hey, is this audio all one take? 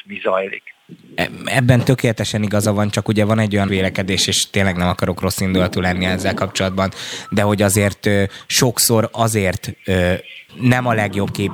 no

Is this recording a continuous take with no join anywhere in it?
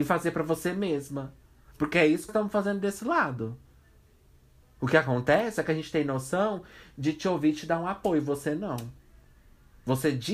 no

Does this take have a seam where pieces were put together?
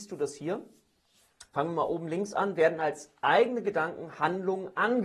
yes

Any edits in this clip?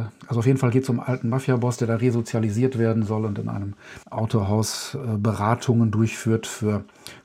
yes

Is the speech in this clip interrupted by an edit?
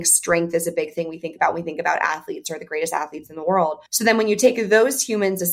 yes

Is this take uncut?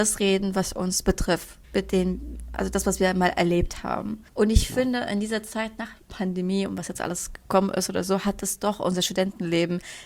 no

